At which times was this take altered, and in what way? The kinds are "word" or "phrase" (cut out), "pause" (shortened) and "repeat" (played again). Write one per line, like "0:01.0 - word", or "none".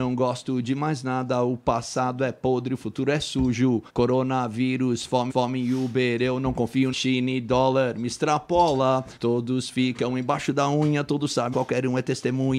0:03.9 - pause
0:05.3 - repeat
0:06.9 - phrase
0:09.2 - pause
0:11.5 - phrase

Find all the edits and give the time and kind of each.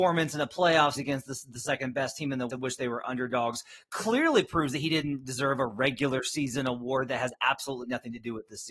0:01.0 - word
0:02.5 - word

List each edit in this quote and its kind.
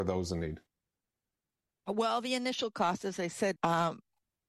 0:03.6 - word

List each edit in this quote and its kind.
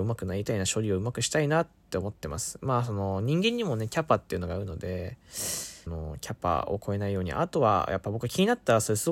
0:05.9 - word

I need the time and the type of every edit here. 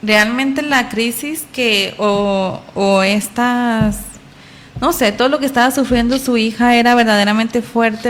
none

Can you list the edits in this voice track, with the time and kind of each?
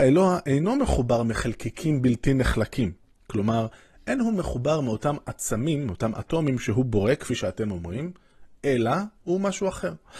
none

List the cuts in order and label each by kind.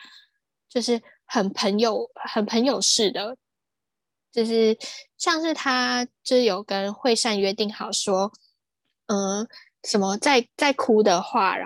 none

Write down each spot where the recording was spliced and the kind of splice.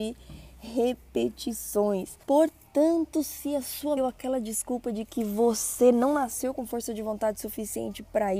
0:02.2 - pause
0:04.0 - phrase

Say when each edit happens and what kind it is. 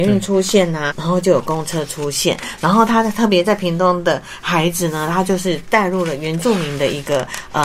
0:00.9 - word

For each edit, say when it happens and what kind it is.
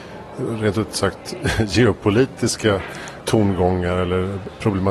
none

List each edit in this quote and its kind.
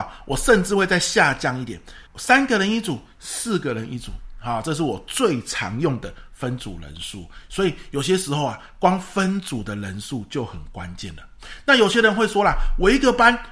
0:02.1 - pause

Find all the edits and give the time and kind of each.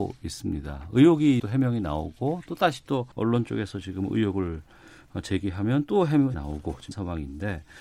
0:01.4 - word
0:03.1 - pause
0:06.3 - word
0:06.9 - word

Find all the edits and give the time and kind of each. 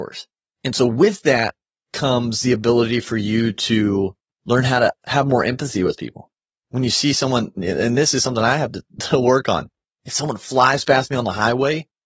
none

